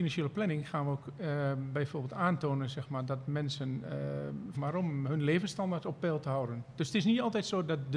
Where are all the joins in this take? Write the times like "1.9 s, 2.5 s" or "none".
4.5 s